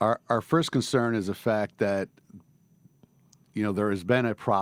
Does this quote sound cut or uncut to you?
uncut